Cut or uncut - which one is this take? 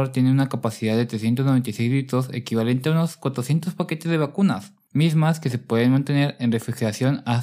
uncut